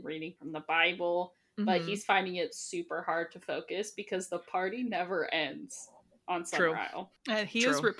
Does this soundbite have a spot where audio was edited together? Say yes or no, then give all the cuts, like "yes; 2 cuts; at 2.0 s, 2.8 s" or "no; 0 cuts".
no; 0 cuts